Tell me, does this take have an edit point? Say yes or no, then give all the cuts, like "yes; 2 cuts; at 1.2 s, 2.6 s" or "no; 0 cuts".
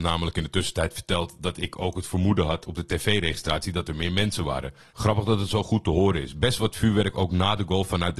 no; 0 cuts